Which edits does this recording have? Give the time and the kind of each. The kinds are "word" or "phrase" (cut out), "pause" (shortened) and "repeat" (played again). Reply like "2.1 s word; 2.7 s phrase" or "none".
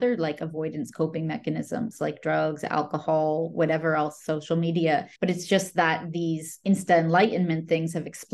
5.2 s pause